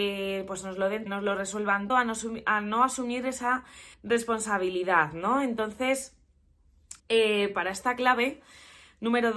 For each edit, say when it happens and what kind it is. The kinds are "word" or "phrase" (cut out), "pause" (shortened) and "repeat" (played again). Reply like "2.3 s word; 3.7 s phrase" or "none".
1.1 s phrase; 1.9 s word; 3.9 s pause; 7.0 s pause